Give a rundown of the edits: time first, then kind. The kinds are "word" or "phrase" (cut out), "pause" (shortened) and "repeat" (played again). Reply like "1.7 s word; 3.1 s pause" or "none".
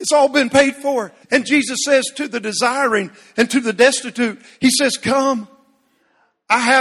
1.2 s pause